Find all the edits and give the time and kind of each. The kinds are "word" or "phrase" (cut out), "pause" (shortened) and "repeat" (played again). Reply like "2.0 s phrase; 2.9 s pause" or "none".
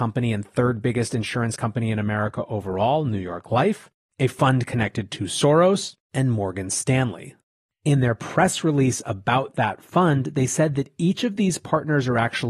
none

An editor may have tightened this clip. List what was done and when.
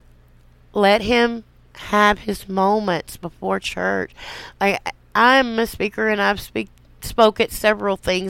none

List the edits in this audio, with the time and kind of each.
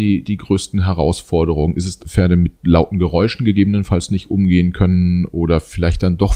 2.0 s phrase; 2.6 s pause

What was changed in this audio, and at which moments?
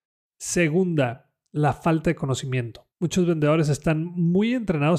2.9 s pause

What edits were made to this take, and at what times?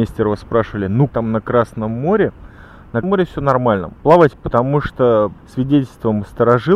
1.1 s word; 3.0 s word; 4.3 s word; 5.4 s word

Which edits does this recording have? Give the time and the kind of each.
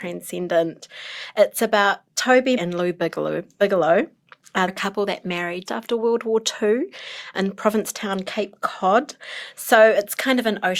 2.6 s word; 4.7 s word; 5.7 s word; 7.3 s word

